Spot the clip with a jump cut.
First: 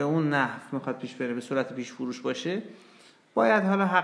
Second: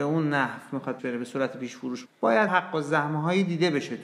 second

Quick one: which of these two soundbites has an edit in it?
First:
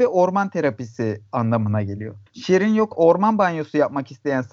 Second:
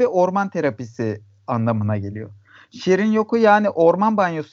first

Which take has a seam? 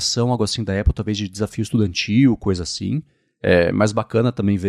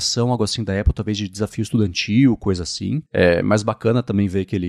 second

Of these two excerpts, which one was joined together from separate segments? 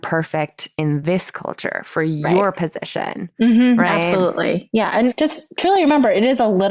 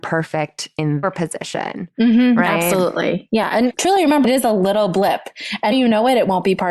second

